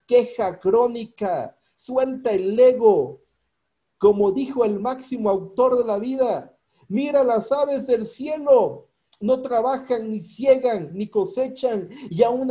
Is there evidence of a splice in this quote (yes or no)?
no